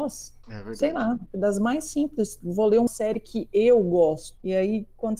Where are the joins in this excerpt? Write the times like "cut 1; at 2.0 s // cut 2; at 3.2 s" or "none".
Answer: cut 1; at 2.9 s